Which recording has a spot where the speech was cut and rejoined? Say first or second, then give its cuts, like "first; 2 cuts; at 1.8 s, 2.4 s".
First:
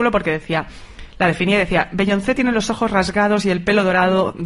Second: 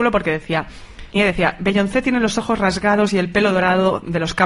second; 1 cut; at 1.2 s